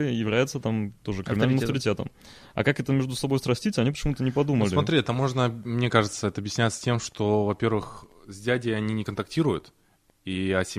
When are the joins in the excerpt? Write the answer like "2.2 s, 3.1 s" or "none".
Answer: none